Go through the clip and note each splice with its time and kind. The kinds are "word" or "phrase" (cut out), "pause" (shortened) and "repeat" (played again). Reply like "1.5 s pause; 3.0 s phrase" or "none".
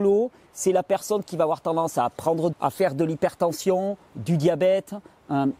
2.5 s phrase